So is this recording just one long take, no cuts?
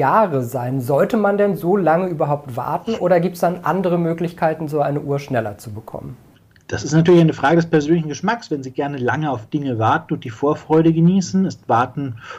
yes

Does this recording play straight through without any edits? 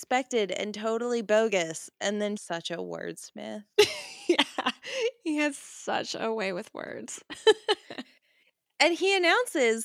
no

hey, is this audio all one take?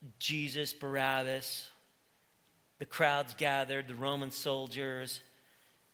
yes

